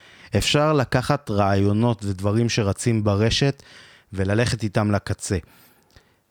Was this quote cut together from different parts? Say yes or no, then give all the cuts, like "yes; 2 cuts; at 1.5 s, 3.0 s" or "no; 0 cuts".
no; 0 cuts